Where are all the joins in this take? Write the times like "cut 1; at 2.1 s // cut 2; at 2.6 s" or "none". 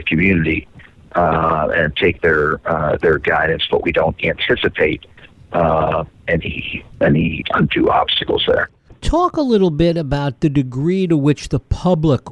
cut 1; at 7.4 s